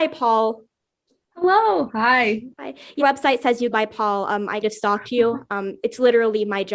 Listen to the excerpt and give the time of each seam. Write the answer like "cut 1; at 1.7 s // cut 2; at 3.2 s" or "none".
cut 1; at 2.5 s // cut 2; at 3.0 s // cut 3; at 3.7 s // cut 4; at 4.6 s